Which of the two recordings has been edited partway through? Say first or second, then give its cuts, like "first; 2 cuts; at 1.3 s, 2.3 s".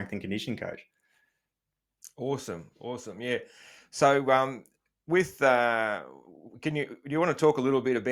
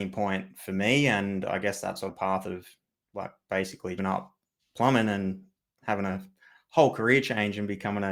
second; 2 cuts; at 2.1 s, 4.0 s